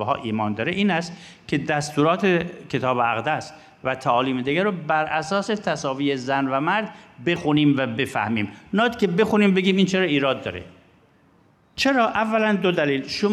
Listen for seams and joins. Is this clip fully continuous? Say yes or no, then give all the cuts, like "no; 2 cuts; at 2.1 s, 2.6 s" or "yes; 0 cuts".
yes; 0 cuts